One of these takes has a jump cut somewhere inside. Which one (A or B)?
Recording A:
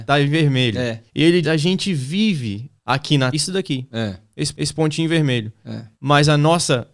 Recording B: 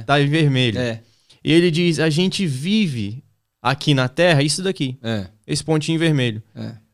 A